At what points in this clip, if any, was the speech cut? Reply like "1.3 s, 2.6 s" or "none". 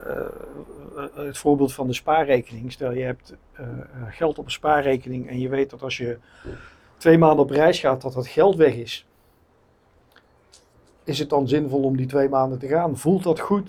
none